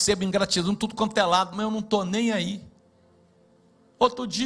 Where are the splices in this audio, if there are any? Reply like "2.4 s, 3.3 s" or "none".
none